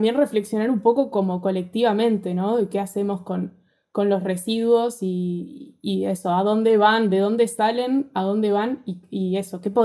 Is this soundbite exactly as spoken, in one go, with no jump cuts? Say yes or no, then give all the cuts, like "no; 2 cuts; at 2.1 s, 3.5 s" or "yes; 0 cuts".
yes; 0 cuts